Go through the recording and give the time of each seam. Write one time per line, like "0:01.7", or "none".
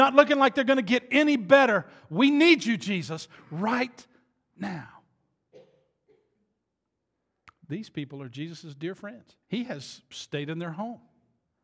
0:09.4